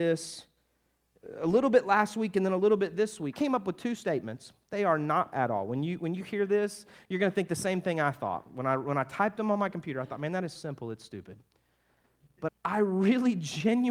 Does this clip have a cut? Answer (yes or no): yes